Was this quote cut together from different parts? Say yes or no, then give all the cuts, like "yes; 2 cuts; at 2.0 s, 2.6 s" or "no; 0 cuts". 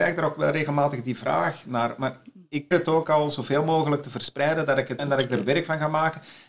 yes; 2 cuts; at 2.7 s, 5.0 s